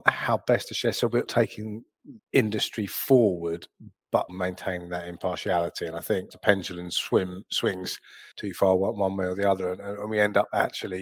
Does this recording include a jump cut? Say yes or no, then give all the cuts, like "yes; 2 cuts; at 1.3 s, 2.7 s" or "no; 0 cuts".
yes; 5 cuts; at 1.3 s, 2.2 s, 4.3 s, 6.3 s, 8.3 s